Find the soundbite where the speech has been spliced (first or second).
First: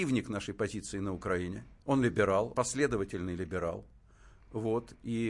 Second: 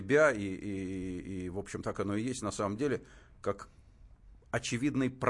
first